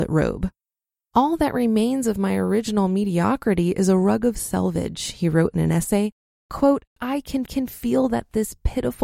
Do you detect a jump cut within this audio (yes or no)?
yes